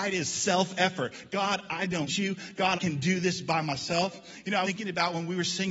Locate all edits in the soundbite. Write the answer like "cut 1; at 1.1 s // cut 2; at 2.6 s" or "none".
cut 1; at 2.1 s // cut 2; at 2.8 s // cut 3; at 4.6 s